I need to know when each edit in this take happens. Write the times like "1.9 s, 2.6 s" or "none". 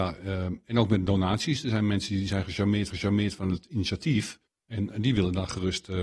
2.9 s, 4.5 s